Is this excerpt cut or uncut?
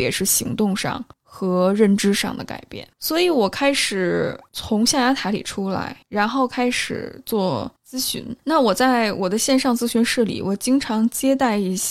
cut